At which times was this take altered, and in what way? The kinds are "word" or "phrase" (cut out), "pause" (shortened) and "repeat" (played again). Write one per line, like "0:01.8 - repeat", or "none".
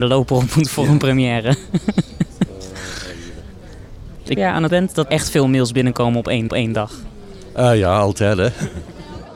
0:04.4 - phrase
0:04.7 - word
0:05.0 - word
0:06.5 - repeat